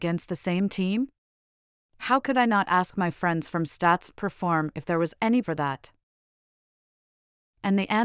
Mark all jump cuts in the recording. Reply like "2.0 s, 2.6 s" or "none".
5.4 s